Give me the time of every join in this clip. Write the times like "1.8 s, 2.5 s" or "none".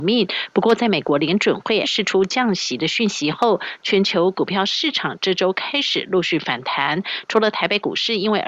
1.8 s